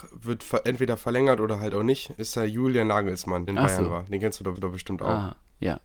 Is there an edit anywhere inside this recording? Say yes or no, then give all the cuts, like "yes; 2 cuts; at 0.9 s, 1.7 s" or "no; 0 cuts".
yes; 3 cuts; at 2.2 s, 3.5 s, 4.6 s